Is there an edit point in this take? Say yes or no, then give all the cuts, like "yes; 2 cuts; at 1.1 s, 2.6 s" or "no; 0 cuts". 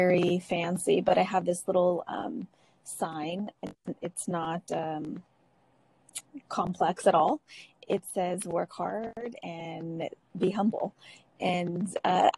no; 0 cuts